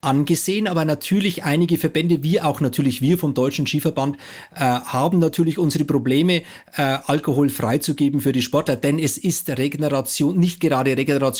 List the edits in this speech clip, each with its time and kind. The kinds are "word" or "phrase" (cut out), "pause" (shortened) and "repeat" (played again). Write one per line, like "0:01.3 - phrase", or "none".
none